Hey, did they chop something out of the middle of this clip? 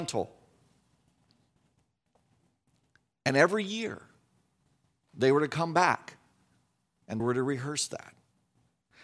yes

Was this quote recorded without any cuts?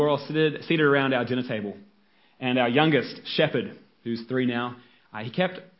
yes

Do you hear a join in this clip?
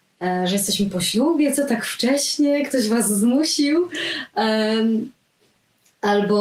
no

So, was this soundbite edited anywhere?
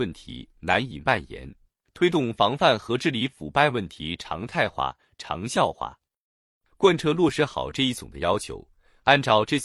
no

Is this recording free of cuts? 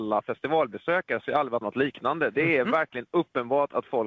no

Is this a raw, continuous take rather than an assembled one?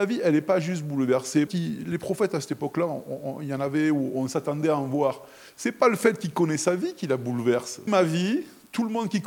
no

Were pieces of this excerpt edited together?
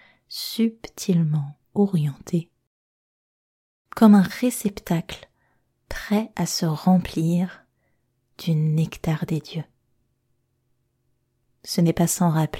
no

